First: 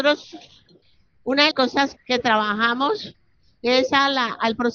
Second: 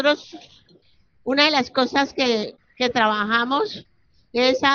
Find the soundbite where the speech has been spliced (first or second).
first